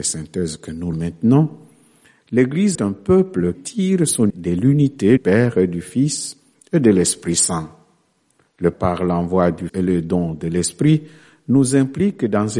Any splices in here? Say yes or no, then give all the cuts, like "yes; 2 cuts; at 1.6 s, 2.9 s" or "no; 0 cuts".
yes; 7 cuts; at 0.9 s, 2.7 s, 3.5 s, 4.3 s, 5.2 s, 8.7 s, 9.7 s